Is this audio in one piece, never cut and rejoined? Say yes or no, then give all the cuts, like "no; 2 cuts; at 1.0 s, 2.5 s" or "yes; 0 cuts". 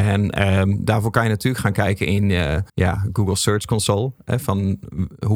no; 1 cut; at 2.7 s